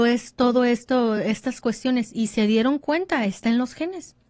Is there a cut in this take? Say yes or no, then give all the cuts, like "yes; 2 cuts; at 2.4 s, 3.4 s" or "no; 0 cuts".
no; 0 cuts